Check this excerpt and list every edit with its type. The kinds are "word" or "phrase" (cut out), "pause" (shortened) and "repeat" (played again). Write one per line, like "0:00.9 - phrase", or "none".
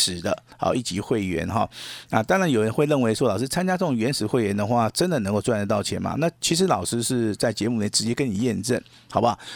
0:06.4 - pause